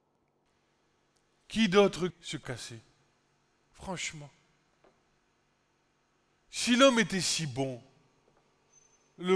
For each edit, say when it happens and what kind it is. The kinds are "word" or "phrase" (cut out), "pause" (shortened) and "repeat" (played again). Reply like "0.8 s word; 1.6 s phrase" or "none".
2.1 s phrase; 2.4 s phrase